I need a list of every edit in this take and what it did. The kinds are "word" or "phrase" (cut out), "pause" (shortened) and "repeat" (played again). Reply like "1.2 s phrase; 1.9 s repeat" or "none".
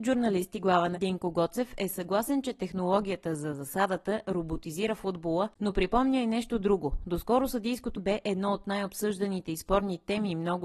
0.9 s phrase; 5.5 s pause; 7.9 s word